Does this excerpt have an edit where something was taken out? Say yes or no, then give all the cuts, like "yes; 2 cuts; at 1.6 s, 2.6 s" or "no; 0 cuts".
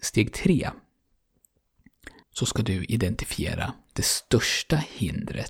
yes; 1 cut; at 2.2 s